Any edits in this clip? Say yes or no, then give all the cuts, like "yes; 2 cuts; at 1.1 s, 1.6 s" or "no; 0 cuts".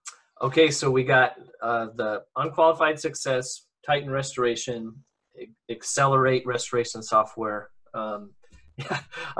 no; 0 cuts